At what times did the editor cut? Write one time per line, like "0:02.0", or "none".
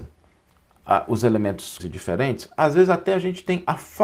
0:01.8